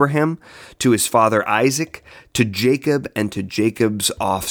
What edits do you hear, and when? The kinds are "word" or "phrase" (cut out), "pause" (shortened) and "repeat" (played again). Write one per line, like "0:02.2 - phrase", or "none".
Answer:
none